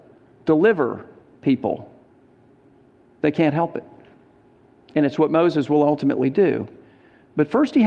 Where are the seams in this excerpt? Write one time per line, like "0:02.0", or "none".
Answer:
none

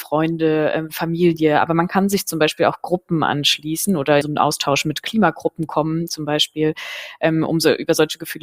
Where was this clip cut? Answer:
0:04.2

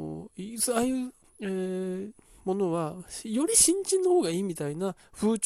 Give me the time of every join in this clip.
0:01.2

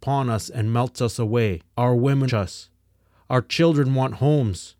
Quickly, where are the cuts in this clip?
0:01.7
0:02.3

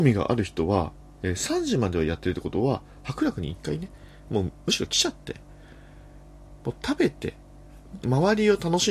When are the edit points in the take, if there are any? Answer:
0:08.0

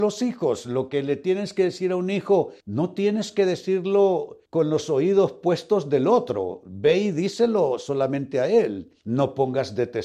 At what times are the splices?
0:02.6
0:04.5
0:09.0

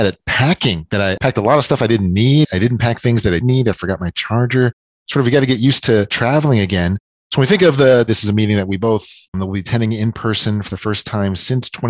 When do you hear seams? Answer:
0:03.4
0:08.1
0:09.2

